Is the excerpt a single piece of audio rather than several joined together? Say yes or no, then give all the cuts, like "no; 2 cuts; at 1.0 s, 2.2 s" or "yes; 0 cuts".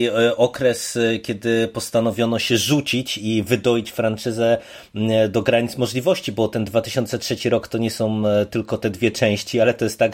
yes; 0 cuts